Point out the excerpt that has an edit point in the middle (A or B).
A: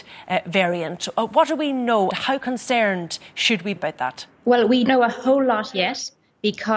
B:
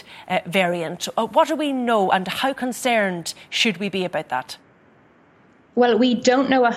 A